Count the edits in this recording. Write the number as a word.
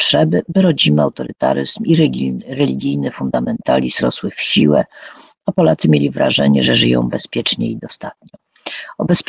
zero